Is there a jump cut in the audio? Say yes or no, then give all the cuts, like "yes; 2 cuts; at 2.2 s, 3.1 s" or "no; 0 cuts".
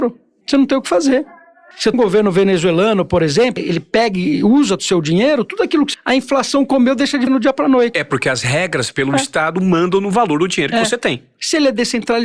yes; 6 cuts; at 1.9 s, 3.6 s, 4.8 s, 5.9 s, 7.3 s, 8.9 s